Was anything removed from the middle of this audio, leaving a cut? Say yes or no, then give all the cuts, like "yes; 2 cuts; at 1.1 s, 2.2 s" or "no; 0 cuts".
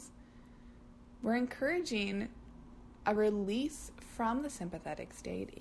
no; 0 cuts